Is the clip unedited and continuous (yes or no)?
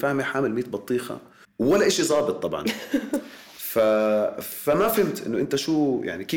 no